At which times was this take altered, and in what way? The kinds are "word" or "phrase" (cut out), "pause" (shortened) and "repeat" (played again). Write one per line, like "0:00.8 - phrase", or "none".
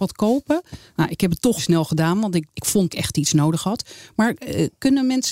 0:01.6 - word
0:02.5 - word
0:02.9 - phrase